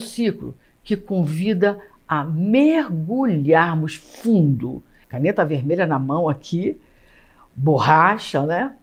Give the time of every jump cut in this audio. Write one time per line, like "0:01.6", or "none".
none